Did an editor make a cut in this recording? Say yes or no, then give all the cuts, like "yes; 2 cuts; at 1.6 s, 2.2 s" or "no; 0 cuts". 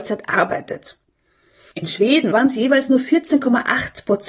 yes; 1 cut; at 2.3 s